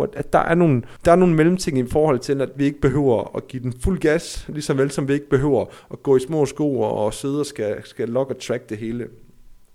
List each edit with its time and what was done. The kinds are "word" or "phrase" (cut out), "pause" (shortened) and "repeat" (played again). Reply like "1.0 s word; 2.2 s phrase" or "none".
1.0 s pause

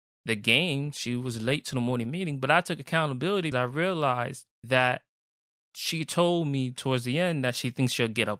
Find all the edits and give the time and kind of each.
3.5 s word; 4.5 s pause

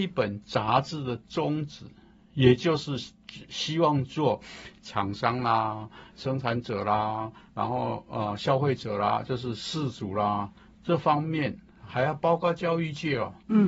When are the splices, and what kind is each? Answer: none

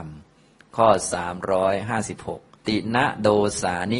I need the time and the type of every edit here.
2.5 s pause

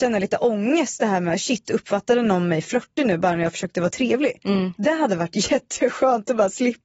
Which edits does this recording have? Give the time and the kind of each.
none

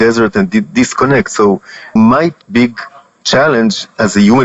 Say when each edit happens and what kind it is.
2.0 s word; 2.4 s pause

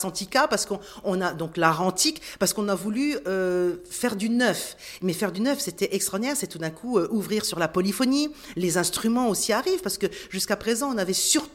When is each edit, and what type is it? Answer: none

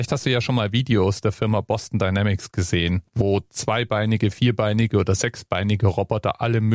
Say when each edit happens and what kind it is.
3.1 s pause

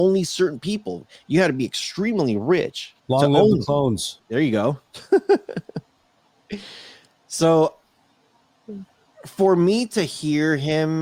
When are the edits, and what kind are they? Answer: 3.0 s pause; 4.2 s pause

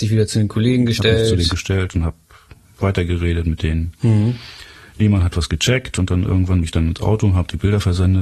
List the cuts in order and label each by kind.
1.5 s word; 6.6 s word

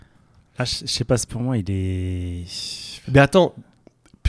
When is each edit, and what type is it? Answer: 1.3 s word; 3.0 s pause

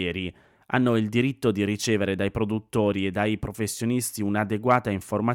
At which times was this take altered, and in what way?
none

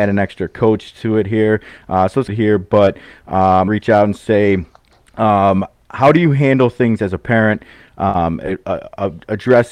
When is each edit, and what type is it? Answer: 2.3 s phrase; 3.7 s phrase

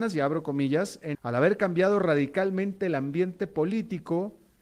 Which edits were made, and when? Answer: 1.1 s phrase

